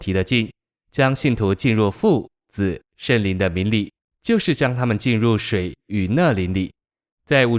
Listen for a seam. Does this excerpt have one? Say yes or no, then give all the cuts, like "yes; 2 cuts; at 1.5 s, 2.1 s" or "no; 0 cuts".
no; 0 cuts